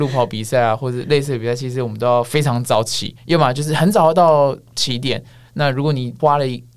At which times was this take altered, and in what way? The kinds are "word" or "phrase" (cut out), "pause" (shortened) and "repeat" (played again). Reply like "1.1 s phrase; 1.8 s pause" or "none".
none